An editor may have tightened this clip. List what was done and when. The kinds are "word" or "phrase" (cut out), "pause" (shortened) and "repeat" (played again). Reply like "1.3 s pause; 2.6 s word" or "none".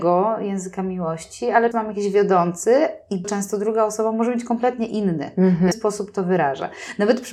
1.7 s word; 3.2 s word; 5.7 s phrase